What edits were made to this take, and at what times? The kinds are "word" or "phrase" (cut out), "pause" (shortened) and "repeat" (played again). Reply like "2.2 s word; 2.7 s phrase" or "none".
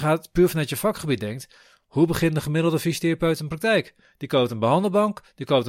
none